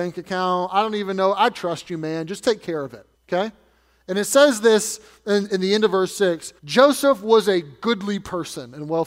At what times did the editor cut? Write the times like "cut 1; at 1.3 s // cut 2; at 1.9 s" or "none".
cut 1; at 3.1 s // cut 2; at 6.6 s

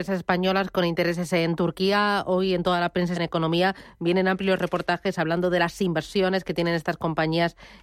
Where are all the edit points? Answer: cut 1; at 3.2 s

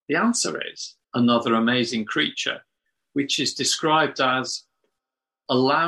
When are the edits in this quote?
cut 1; at 1.0 s

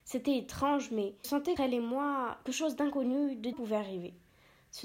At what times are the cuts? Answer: cut 1; at 1.2 s // cut 2; at 1.6 s // cut 3; at 2.5 s // cut 4; at 3.5 s

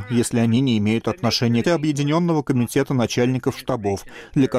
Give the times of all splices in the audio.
cut 1; at 1.6 s

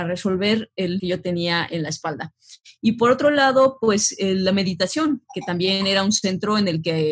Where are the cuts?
cut 1; at 1.0 s

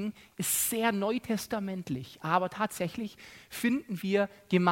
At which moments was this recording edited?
none

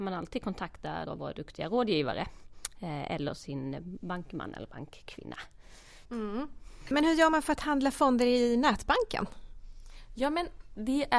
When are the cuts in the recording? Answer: cut 1; at 1.0 s // cut 2; at 6.0 s

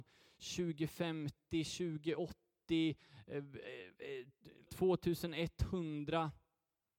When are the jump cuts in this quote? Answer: cut 1; at 4.7 s

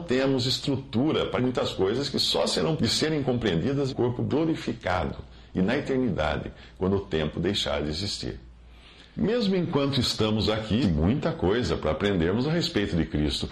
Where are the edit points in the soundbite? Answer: cut 1; at 1.4 s // cut 2; at 2.8 s // cut 3; at 3.9 s // cut 4; at 10.8 s

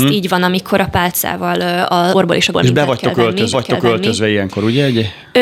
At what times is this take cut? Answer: cut 1; at 2.1 s // cut 2; at 2.5 s // cut 3; at 3.5 s

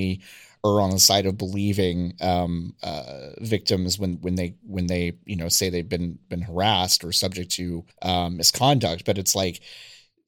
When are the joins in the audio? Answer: cut 1; at 7.9 s

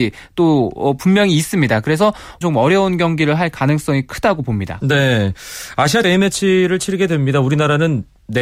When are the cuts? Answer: cut 1; at 2.4 s // cut 2; at 6.0 s

